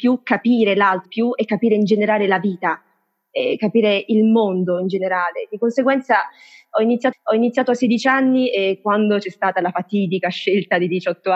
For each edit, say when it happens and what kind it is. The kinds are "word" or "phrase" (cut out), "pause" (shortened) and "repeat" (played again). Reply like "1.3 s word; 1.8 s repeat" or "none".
1.1 s word; 7.1 s repeat